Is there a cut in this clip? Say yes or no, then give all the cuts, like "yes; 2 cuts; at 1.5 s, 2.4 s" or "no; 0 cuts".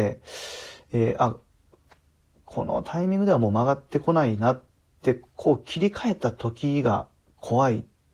no; 0 cuts